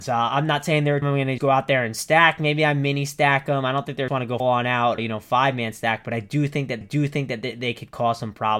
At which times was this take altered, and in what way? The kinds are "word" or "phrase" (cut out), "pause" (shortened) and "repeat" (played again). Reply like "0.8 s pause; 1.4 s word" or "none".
1.0 s word; 1.4 s word; 4.1 s phrase; 4.4 s word; 5.0 s word; 6.8 s repeat